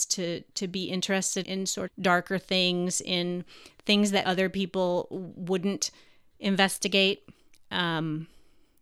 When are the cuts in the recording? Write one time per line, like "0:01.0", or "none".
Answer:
0:01.4
0:01.9
0:04.2